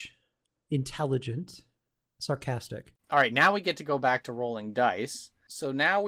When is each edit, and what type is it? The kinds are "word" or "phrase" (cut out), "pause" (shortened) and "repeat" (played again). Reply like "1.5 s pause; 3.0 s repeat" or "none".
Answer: 3.0 s pause